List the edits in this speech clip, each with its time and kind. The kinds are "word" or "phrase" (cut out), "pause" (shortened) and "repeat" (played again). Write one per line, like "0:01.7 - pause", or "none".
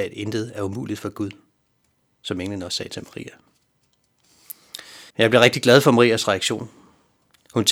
0:05.1 - pause